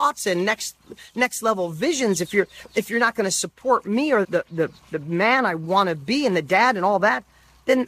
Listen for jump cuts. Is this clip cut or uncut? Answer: cut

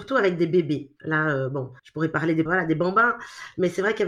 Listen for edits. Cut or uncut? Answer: cut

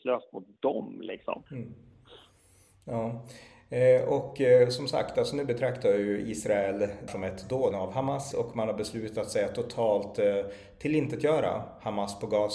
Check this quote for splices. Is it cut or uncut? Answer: cut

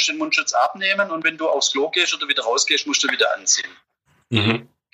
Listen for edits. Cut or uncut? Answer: uncut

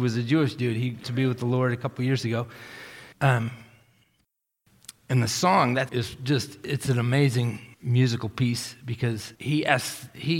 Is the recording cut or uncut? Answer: cut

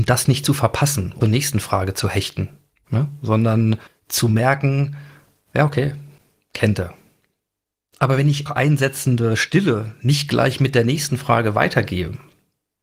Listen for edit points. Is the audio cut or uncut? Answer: cut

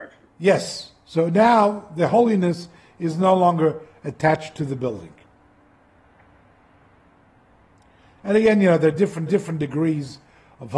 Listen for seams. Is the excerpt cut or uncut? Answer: cut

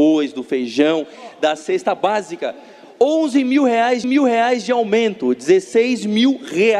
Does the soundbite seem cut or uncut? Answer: cut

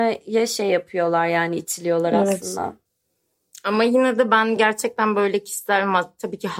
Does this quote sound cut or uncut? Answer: uncut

